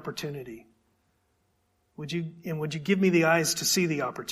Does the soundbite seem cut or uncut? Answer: uncut